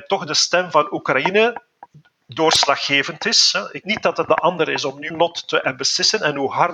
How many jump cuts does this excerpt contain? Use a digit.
3